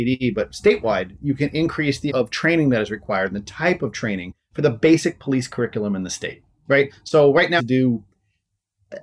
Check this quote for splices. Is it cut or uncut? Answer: cut